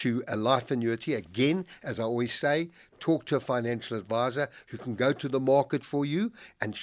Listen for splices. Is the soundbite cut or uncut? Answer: uncut